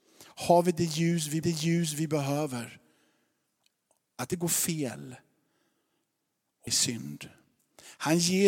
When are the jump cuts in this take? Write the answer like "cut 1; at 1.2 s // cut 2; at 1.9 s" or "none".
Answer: cut 1; at 1.4 s // cut 2; at 4.3 s // cut 3; at 6.7 s